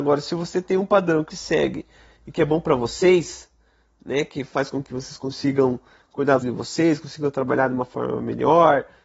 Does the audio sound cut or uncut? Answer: cut